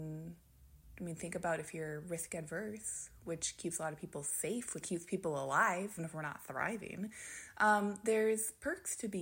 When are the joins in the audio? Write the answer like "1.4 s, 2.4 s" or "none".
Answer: 4.8 s, 6.0 s